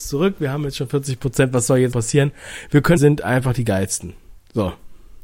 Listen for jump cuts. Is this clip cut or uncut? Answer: cut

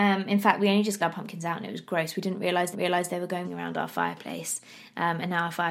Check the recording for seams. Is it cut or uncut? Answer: cut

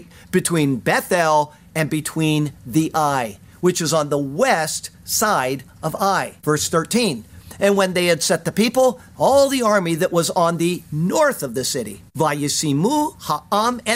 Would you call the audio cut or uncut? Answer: cut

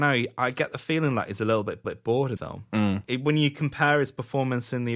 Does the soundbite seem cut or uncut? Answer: cut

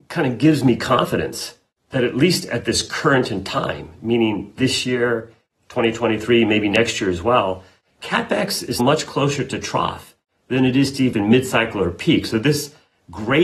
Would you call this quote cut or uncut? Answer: cut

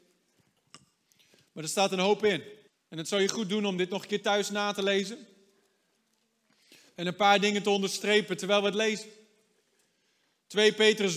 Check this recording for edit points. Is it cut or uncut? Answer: cut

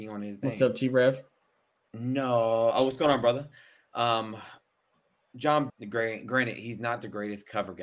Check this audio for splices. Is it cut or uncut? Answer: cut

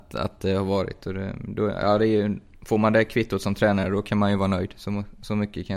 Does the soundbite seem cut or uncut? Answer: uncut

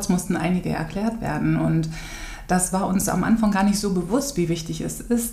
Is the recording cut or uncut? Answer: uncut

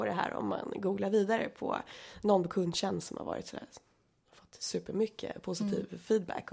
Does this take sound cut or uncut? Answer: uncut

